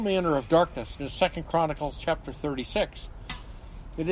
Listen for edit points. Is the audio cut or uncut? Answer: cut